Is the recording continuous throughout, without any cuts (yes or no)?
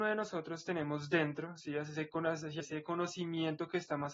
no